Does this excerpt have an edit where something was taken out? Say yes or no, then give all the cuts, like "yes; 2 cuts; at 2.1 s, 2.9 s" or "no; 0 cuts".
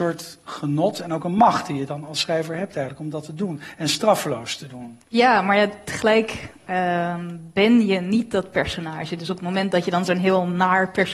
yes; 1 cut; at 5.0 s